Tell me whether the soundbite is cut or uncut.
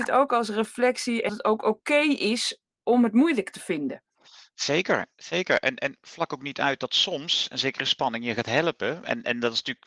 cut